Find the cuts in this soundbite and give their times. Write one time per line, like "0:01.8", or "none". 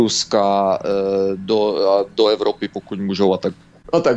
none